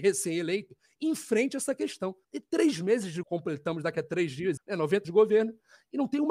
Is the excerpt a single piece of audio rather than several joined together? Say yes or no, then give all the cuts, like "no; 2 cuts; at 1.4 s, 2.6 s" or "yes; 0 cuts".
no; 4 cuts; at 2.2 s, 3.2 s, 4.6 s, 5.0 s